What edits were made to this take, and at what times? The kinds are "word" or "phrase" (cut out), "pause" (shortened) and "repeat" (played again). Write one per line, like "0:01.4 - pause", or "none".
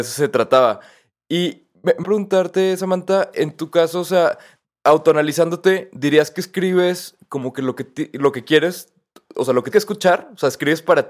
0:02.0 - word
0:09.7 - word